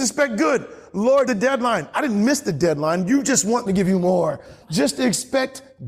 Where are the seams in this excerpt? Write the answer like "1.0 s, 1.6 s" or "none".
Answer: 1.3 s, 3.7 s, 4.6 s